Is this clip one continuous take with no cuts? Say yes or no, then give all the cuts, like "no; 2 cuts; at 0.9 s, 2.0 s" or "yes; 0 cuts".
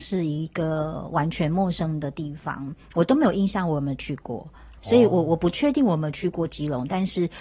yes; 0 cuts